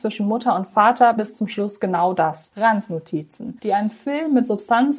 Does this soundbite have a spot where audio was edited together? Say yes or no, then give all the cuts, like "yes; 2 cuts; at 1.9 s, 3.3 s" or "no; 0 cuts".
yes; 1 cut; at 1.2 s